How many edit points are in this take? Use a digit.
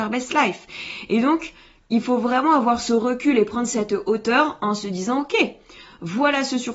0